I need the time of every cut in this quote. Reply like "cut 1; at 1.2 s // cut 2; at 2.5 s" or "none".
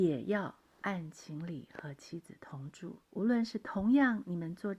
cut 1; at 3.0 s